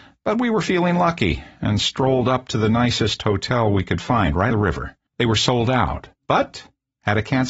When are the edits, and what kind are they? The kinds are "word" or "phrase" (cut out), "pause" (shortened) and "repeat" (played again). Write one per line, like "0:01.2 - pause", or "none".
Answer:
0:04.5 - word
0:05.1 - pause
0:06.1 - pause